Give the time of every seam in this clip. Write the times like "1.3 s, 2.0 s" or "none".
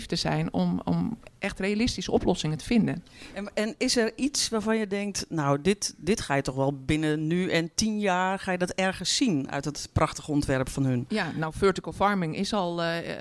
none